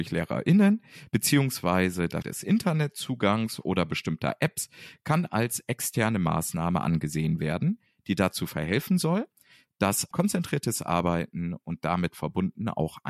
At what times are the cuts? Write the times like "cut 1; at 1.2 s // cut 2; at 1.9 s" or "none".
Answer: cut 1; at 2.2 s // cut 2; at 10.1 s